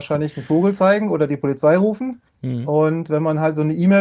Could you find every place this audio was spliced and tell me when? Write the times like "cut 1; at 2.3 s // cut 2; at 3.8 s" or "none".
cut 1; at 2.3 s